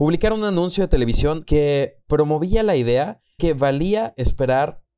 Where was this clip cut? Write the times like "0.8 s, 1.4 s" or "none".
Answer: 3.4 s